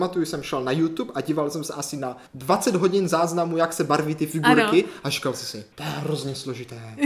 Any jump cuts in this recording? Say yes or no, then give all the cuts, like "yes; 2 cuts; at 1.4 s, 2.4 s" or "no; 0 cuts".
yes; 2 cuts; at 2.3 s, 5.7 s